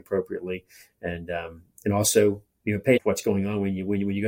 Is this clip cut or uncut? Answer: cut